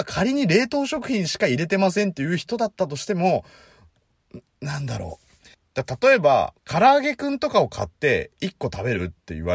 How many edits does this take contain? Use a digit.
2